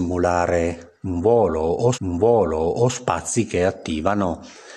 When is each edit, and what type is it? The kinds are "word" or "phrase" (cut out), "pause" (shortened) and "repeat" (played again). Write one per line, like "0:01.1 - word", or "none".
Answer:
0:01.9 - repeat

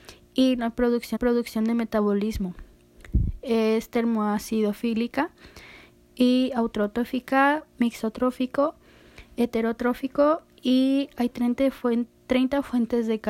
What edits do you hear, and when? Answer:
0:01.2 - repeat
0:06.0 - pause

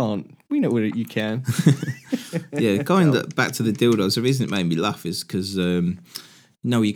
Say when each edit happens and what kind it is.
none

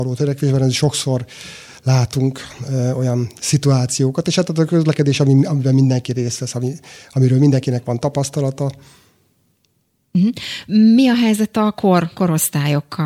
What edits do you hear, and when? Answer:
none

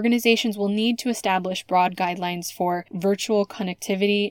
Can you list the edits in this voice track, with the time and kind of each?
none

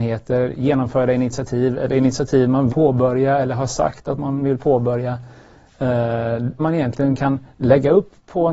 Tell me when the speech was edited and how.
0:02.7 - word
0:06.6 - word

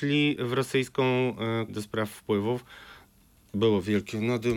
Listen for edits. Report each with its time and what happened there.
0:01.7 - word

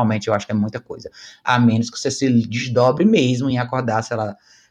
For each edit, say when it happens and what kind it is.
none

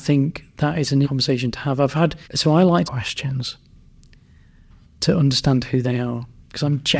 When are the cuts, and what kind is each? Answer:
0:01.0 - word
0:02.2 - pause
0:02.8 - phrase

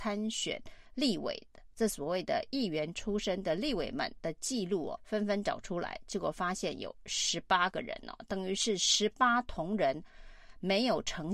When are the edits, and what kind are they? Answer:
0:05.0 - word

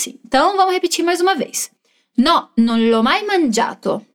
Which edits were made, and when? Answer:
none

